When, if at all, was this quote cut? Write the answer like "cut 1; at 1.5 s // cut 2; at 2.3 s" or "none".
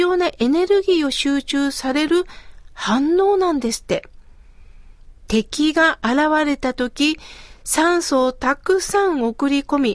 cut 1; at 5.2 s